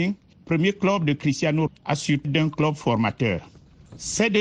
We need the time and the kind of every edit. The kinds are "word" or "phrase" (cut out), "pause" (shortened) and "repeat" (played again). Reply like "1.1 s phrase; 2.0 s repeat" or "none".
1.7 s word; 2.2 s word